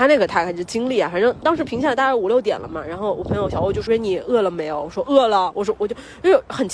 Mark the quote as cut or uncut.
cut